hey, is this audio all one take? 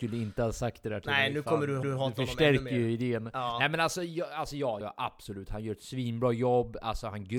no; 2 cuts; at 1.8 s, 4.8 s

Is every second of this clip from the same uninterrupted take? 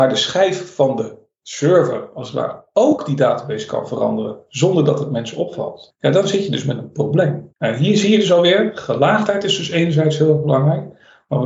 yes; 0 cuts

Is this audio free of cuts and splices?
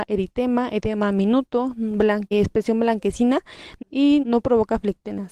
no; 3 cuts; at 2.3 s, 3.8 s, 4.2 s

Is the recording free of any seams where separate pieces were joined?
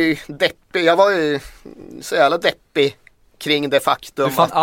yes; 0 cuts

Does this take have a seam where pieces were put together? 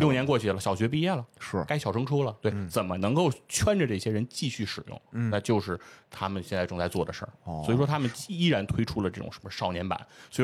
no; 0 cuts

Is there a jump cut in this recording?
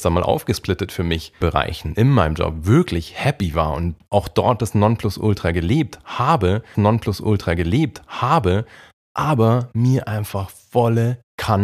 yes; 2 cuts; at 1.4 s, 6.7 s

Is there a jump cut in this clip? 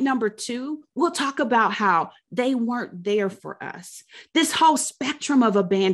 no; 0 cuts

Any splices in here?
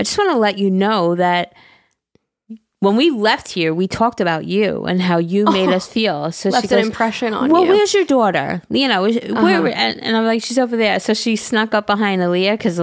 no; 0 cuts

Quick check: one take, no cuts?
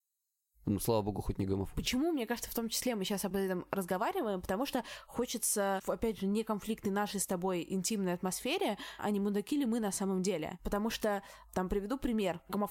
no; 1 cut; at 9.0 s

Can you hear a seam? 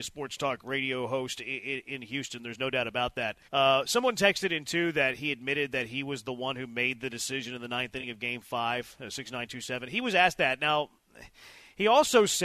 yes; 1 cut; at 3.4 s

